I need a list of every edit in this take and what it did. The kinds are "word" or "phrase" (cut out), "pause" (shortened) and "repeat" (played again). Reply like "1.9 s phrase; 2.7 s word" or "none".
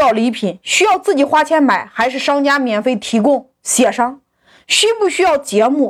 none